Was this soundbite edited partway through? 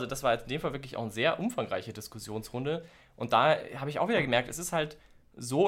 no; 0 cuts

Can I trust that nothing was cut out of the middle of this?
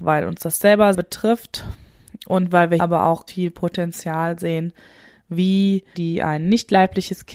no; 4 cuts; at 0.9 s, 2.8 s, 3.3 s, 5.9 s

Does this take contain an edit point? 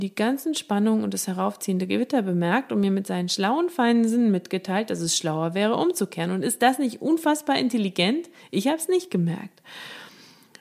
no; 0 cuts

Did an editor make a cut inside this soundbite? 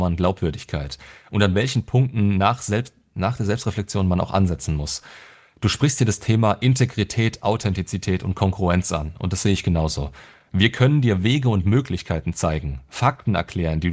no; 0 cuts

